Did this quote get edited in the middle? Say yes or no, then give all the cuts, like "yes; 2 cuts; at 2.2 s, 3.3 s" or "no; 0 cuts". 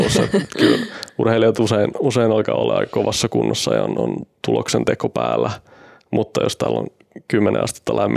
no; 0 cuts